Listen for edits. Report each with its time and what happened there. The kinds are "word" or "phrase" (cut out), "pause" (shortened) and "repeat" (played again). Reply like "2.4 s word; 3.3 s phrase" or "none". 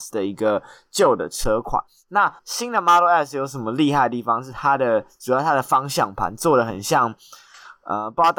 2.4 s pause